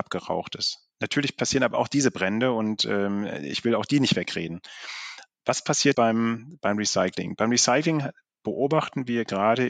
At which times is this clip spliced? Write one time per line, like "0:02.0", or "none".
0:05.9